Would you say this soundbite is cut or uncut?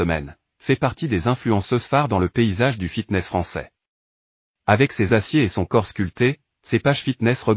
cut